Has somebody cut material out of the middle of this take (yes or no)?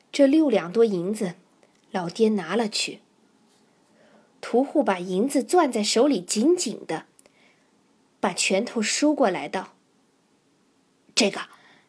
no